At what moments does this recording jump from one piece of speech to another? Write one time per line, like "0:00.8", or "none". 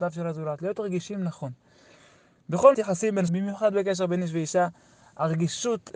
0:02.7
0:03.3